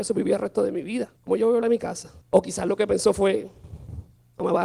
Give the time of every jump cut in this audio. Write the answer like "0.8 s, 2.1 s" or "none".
1.2 s, 1.6 s, 2.2 s